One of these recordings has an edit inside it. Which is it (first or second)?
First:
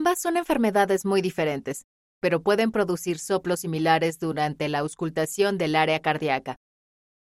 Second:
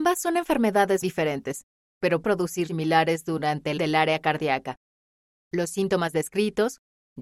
second